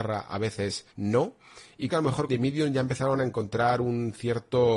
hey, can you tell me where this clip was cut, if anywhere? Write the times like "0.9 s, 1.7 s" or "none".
0.9 s, 1.9 s, 2.3 s